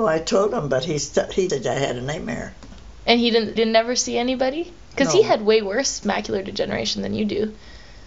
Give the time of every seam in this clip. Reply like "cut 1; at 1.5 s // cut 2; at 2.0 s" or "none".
cut 1; at 1.5 s // cut 2; at 3.6 s